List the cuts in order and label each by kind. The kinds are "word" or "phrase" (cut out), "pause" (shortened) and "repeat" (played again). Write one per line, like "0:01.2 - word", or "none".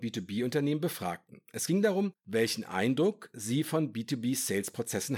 0:02.2 - pause